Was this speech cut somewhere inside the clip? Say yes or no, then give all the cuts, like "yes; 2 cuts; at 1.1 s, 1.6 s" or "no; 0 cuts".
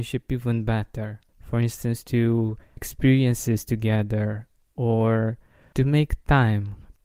yes; 3 cuts; at 1.3 s, 2.8 s, 5.7 s